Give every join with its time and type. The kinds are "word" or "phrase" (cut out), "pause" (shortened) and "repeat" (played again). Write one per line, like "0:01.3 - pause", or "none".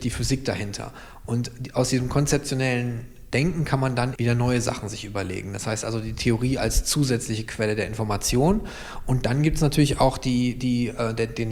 0:04.2 - word